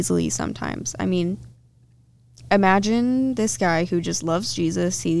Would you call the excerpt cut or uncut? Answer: uncut